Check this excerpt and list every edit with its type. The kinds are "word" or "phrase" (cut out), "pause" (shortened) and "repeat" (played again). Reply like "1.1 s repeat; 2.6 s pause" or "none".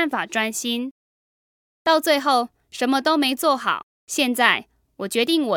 3.9 s pause